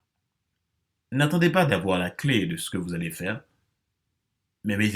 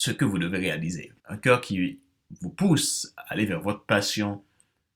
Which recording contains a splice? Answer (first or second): second